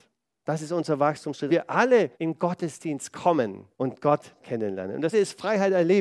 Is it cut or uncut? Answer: cut